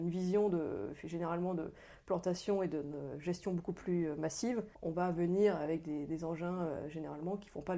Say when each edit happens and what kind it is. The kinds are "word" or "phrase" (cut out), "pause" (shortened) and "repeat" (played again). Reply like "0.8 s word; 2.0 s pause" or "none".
4.7 s pause